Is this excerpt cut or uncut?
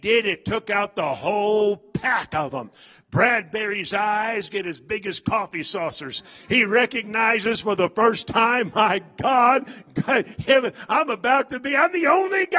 uncut